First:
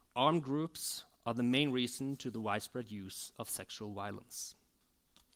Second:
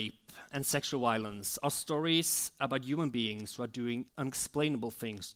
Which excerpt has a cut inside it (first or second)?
second